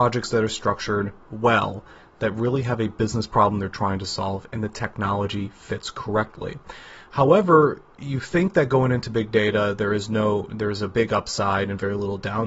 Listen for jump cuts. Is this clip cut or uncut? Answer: uncut